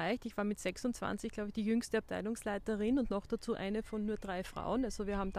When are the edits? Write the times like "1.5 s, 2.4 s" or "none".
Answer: none